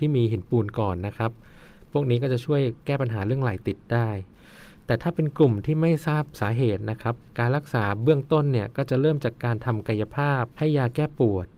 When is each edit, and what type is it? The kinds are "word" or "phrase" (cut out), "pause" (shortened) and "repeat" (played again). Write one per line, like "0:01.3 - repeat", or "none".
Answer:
0:10.5 - pause

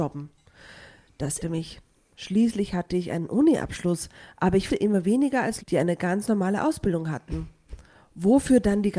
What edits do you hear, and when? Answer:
0:01.4 - word
0:04.7 - word
0:05.6 - word

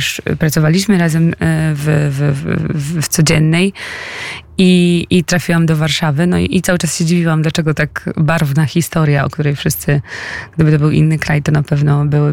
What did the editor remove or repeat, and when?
none

